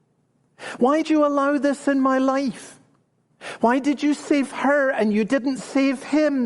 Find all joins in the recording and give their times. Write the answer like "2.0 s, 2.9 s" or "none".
1.0 s

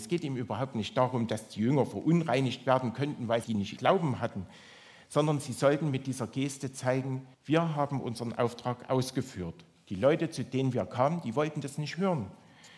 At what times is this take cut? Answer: 3.4 s, 3.8 s, 7.3 s

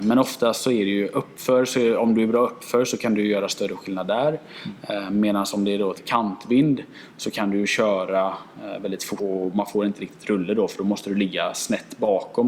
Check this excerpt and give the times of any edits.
6.0 s, 9.2 s

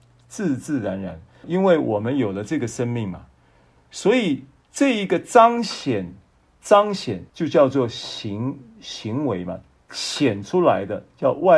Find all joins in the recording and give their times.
1.4 s, 7.3 s

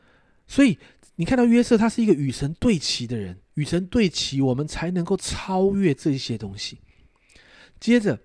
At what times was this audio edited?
3.5 s

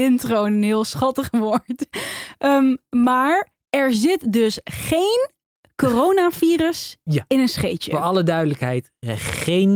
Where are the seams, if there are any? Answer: none

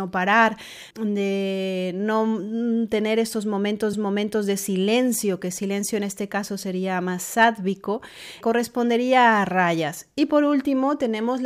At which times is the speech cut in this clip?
0.9 s, 3.9 s, 8.4 s

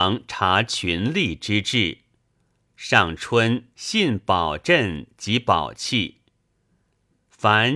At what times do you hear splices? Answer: 3.7 s

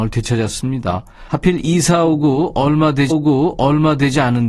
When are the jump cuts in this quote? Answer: 3.1 s

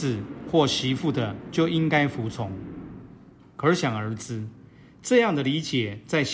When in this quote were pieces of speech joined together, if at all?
none

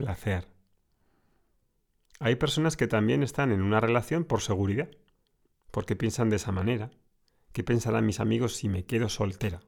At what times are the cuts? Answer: none

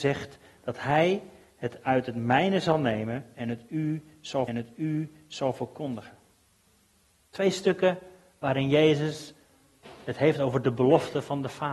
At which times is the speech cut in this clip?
4.5 s

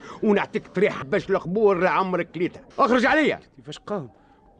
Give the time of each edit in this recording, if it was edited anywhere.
1.0 s, 2.7 s

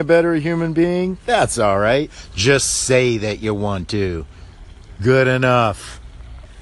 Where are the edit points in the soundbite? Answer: none

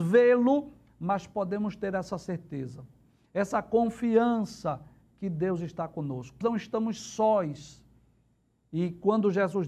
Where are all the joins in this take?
6.4 s

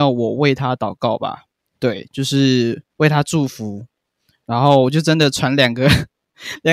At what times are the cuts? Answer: 2.9 s

